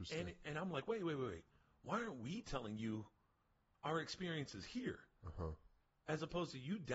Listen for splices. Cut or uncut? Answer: uncut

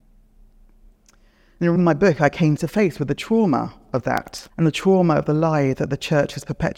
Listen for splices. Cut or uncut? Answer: cut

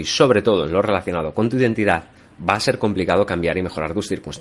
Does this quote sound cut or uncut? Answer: uncut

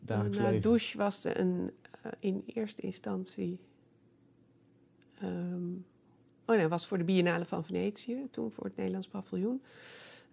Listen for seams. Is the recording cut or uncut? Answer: uncut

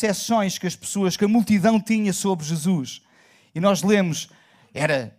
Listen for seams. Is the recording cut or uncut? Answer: uncut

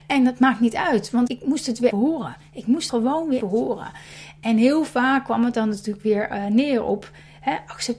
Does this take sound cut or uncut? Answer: cut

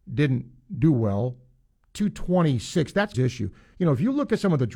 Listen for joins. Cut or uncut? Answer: cut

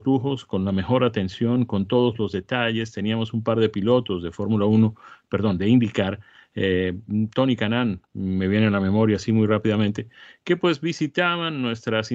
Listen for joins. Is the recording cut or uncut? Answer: uncut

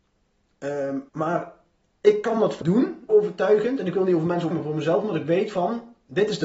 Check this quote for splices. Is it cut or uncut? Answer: cut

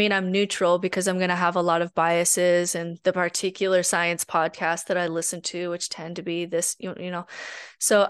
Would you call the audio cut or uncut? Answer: uncut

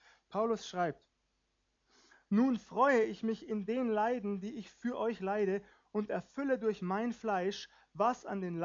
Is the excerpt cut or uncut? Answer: uncut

